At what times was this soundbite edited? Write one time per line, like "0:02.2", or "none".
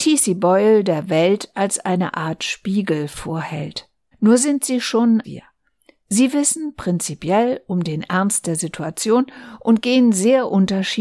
0:04.1
0:05.2